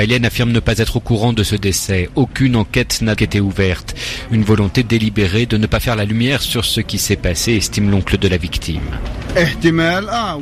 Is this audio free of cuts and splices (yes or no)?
no